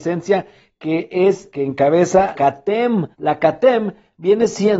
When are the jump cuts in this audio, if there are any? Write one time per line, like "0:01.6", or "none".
0:01.5
0:02.3
0:03.1